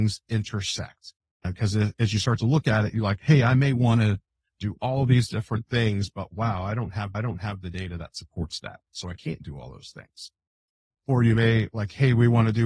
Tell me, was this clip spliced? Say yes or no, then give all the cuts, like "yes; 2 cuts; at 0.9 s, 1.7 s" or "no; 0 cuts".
yes; 1 cut; at 7.1 s